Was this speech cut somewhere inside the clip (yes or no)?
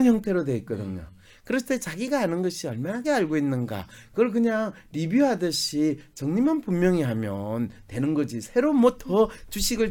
yes